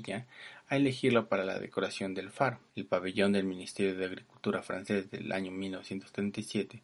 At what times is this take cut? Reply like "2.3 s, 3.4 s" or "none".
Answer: 2.7 s